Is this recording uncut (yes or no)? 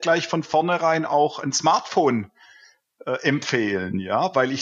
yes